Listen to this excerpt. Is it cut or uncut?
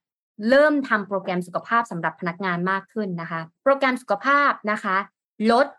cut